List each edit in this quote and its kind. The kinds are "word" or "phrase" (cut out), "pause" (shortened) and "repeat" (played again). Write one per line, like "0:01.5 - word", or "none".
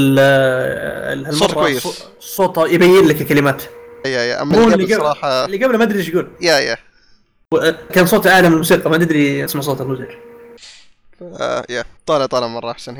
0:04.0 - word
0:06.4 - pause
0:07.9 - phrase
0:09.5 - phrase
0:12.0 - pause